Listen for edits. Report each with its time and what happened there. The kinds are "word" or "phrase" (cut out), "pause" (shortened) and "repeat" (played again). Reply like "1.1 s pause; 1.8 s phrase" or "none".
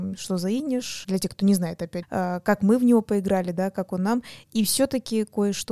1.0 s word; 2.0 s word

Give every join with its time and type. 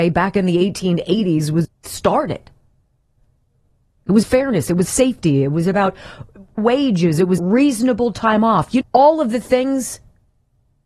1.6 s word; 4.2 s word; 4.8 s word; 6.6 s word; 7.4 s word; 8.8 s word

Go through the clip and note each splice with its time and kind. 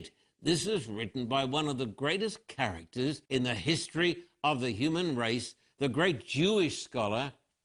3.3 s pause

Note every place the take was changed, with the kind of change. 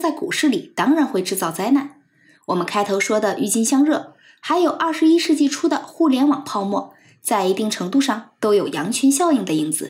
none

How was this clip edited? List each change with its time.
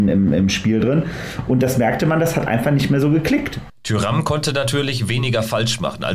none

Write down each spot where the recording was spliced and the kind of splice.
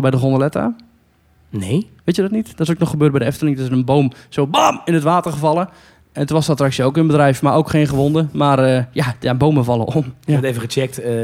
2.0 s pause

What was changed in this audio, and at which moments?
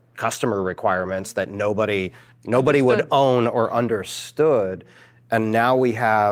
none

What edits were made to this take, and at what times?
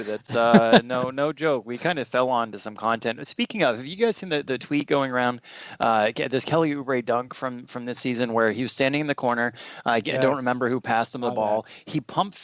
none

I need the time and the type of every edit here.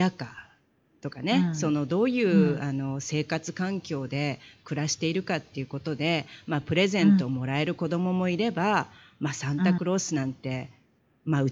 none

